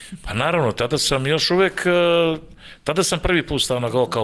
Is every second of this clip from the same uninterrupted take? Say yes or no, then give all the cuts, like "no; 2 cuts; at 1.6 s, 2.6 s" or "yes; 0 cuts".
yes; 0 cuts